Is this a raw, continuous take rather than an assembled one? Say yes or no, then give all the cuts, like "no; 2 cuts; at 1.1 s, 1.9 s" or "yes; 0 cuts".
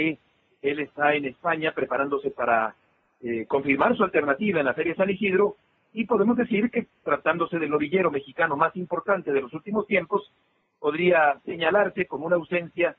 yes; 0 cuts